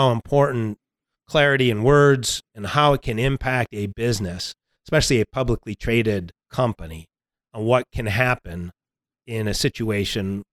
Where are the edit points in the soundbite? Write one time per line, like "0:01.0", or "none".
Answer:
none